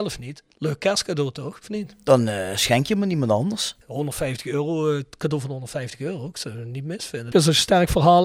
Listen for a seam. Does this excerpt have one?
no; 0 cuts

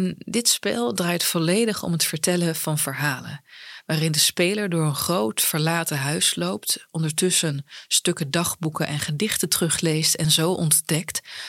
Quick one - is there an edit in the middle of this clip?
no; 0 cuts

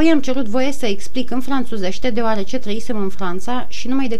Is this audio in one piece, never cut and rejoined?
yes; 0 cuts

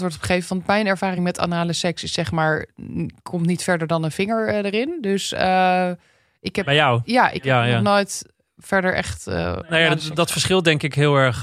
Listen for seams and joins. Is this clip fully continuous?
yes; 0 cuts

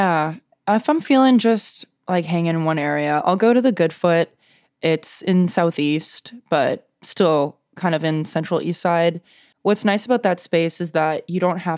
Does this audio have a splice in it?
no; 0 cuts

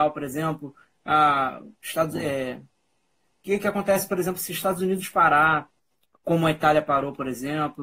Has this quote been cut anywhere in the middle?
no; 0 cuts

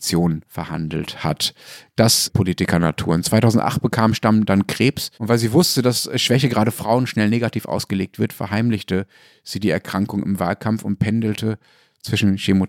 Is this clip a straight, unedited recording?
no; 2 cuts; at 2.3 s, 5.1 s

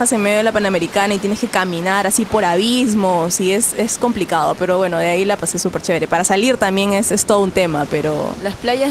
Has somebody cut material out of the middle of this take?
no; 0 cuts

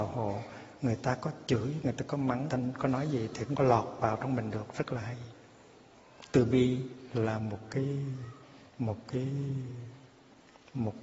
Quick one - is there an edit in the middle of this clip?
yes; 3 cuts; at 2.5 s, 3.5 s, 8.7 s

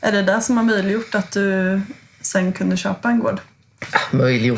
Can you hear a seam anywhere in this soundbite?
no; 0 cuts

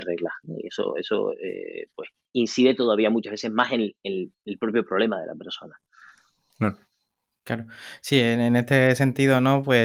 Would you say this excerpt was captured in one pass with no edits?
yes; 0 cuts

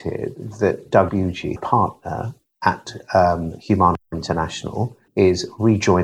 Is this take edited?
yes; 2 cuts; at 1.6 s, 5.1 s

